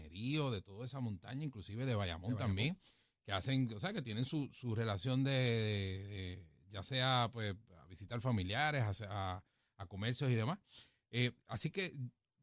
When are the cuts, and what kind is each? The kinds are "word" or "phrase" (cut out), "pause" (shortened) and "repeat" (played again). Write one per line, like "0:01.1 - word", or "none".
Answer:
none